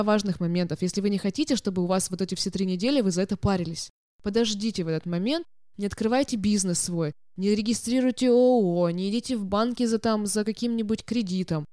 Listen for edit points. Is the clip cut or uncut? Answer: uncut